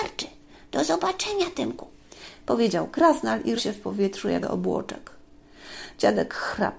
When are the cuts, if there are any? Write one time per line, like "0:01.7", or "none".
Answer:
0:03.6
0:04.4